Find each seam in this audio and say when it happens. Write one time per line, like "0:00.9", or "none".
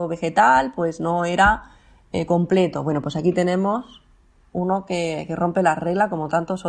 none